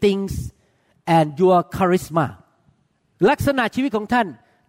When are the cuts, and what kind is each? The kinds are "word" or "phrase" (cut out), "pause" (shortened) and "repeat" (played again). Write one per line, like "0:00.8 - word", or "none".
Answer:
none